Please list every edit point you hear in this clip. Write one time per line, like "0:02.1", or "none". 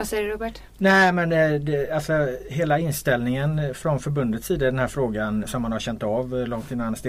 0:05.4